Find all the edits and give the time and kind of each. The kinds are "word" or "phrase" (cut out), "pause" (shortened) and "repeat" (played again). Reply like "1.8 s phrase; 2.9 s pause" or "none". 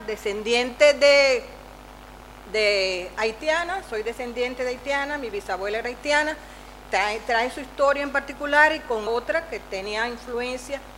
9.1 s word